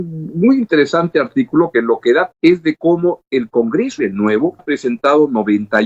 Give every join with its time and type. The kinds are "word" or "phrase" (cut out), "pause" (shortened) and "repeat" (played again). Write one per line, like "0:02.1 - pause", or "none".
0:01.7 - word
0:02.3 - word
0:04.0 - word
0:04.6 - word